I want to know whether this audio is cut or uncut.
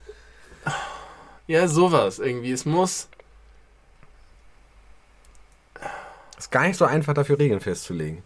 uncut